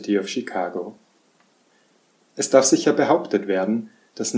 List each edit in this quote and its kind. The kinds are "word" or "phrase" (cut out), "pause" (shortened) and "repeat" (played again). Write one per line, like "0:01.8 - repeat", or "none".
none